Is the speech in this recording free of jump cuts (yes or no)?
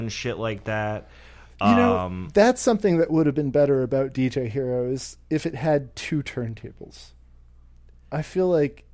yes